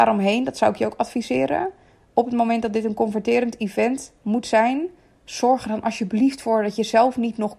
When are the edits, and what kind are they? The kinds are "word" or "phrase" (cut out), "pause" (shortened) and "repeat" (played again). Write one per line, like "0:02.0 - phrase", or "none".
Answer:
none